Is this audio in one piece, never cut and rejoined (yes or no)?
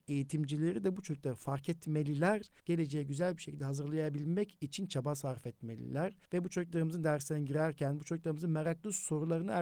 no